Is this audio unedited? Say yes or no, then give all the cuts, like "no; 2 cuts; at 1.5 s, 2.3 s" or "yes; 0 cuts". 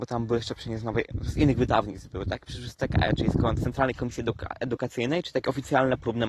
yes; 0 cuts